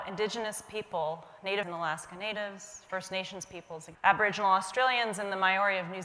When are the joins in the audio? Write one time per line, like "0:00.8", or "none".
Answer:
0:01.6
0:03.9